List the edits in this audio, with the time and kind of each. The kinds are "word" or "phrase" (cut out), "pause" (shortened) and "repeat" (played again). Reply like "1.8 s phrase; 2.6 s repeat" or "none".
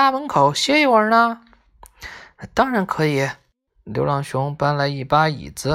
none